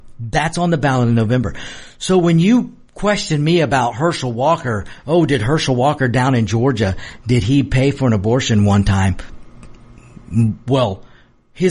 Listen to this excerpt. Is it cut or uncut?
uncut